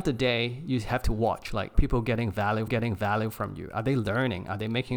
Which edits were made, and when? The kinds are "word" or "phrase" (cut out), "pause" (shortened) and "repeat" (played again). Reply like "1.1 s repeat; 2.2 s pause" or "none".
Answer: 1.7 s word; 2.7 s repeat